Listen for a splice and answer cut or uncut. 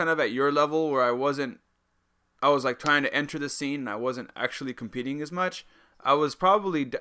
uncut